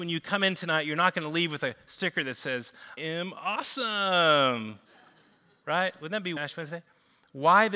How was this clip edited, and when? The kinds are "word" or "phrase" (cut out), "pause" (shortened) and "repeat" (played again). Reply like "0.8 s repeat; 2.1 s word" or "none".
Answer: 3.0 s word; 4.8 s pause; 6.4 s word